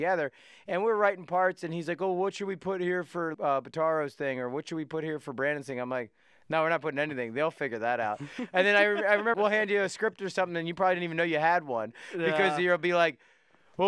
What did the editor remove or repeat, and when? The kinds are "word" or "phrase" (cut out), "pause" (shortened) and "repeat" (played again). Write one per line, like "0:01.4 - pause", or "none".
0:03.3 - word
0:09.3 - word